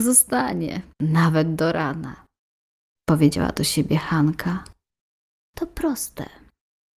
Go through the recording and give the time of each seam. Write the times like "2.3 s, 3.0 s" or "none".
0.9 s